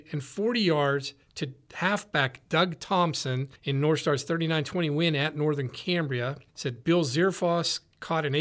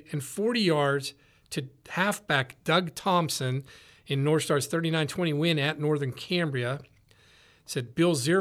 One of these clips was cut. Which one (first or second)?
first